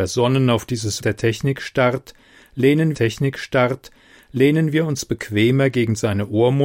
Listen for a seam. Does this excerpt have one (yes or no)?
yes